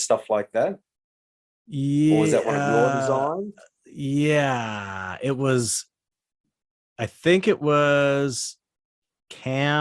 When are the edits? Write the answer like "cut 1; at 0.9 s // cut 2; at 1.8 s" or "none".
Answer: none